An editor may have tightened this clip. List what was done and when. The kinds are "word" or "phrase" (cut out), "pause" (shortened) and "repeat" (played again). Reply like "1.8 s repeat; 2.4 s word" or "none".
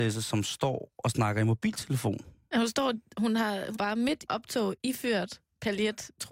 3.7 s word; 4.3 s phrase